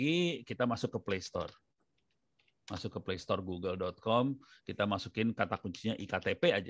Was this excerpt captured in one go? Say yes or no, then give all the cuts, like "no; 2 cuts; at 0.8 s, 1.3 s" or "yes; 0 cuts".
yes; 0 cuts